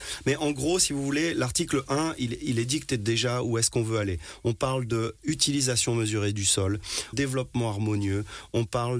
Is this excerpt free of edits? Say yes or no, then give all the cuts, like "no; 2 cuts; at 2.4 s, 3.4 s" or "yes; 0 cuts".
no; 1 cut; at 7.1 s